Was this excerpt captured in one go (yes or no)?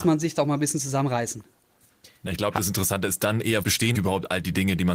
no